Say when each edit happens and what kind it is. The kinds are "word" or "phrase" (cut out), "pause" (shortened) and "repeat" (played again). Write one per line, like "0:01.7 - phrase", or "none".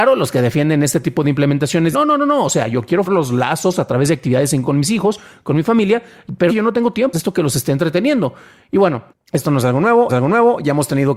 0:01.9 - word
0:03.0 - word
0:04.6 - word
0:06.5 - phrase
0:07.1 - word
0:09.1 - pause
0:10.1 - repeat